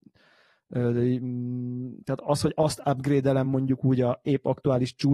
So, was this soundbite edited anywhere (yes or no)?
no